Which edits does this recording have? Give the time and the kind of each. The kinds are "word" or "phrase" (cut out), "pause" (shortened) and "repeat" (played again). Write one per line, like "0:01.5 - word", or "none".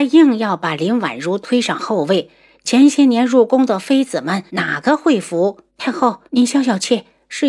0:04.5 - pause
0:05.7 - pause
0:06.3 - pause